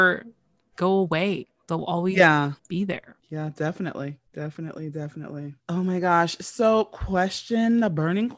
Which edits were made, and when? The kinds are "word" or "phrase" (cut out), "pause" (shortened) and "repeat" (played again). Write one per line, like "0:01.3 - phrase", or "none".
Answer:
0:02.6 - pause
0:03.2 - pause
0:04.3 - pause
0:05.6 - pause